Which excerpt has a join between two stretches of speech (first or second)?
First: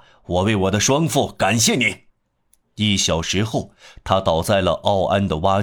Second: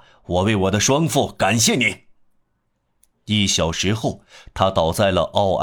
first